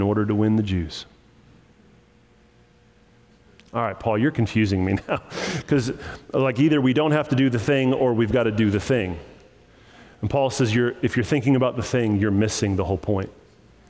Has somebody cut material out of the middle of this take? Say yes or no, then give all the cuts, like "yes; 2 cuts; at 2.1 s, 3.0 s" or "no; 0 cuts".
no; 0 cuts